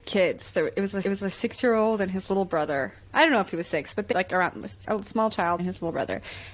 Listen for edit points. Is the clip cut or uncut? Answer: cut